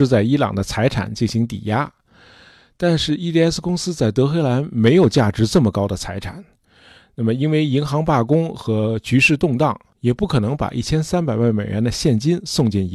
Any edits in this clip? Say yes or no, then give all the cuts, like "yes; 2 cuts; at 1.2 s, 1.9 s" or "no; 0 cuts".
no; 0 cuts